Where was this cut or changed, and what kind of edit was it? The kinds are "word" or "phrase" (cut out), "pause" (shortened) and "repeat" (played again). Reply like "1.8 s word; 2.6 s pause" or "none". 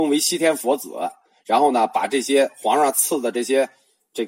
none